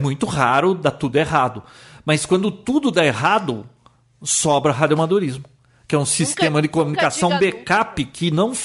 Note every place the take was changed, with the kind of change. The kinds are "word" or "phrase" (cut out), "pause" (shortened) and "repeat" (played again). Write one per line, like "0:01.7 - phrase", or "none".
none